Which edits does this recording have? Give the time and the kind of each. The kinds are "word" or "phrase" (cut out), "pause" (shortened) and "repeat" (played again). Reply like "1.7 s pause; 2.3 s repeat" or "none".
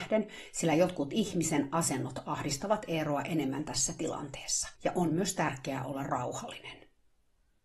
4.8 s pause